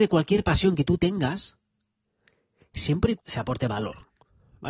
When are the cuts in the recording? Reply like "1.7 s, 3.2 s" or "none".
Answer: 3.2 s